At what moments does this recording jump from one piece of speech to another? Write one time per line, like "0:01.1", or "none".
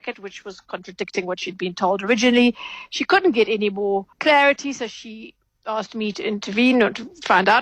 0:04.1